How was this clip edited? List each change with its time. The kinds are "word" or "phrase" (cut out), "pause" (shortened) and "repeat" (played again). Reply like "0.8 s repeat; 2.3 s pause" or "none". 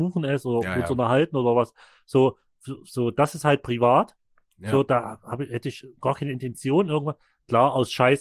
none